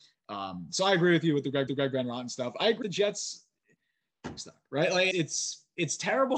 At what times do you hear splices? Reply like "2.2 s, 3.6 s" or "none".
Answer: 1.7 s, 2.8 s, 4.4 s, 5.1 s